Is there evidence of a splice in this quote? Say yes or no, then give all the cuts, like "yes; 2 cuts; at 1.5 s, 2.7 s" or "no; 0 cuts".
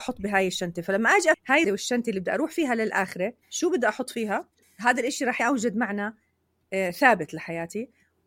yes; 5 cuts; at 1.3 s, 1.6 s, 3.4 s, 4.6 s, 5.4 s